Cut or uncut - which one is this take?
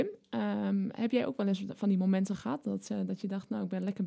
uncut